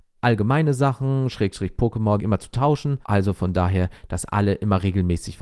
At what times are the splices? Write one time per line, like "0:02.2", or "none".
0:02.2
0:03.0